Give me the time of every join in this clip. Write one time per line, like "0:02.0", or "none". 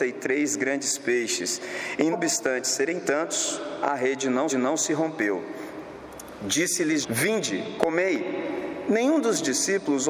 0:02.1
0:04.5
0:07.0

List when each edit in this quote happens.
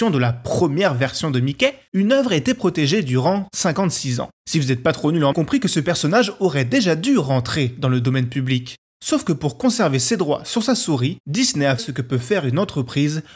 0:05.3
0:11.8

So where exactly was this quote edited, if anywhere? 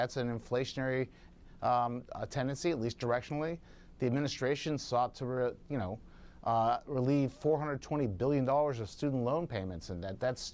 none

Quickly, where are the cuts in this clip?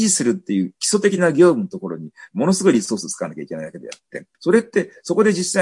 0:04.3

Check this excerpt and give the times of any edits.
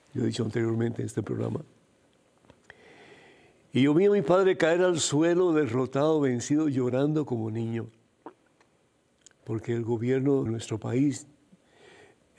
0:10.5

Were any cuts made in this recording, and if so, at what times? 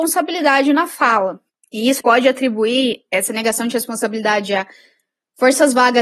0:01.5
0:02.0

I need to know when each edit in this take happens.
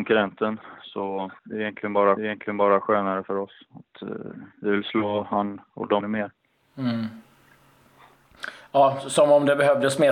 0:01.4
0:02.2
0:04.5
0:06.0

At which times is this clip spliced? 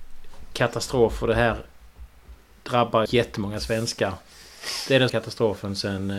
0:03.1
0:05.1

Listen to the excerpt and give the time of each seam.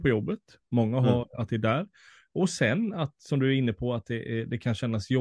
none

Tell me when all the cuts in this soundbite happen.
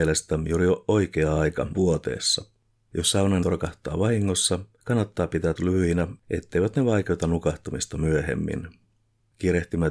0:01.7
0:03.4
0:05.6

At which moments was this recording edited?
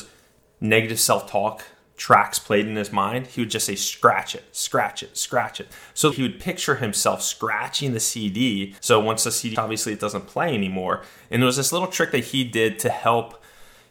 0:06.1
0:08.8
0:09.5

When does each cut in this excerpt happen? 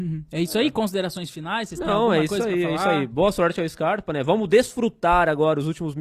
none

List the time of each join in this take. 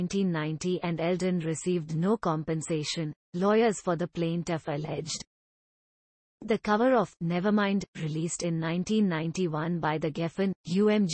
none

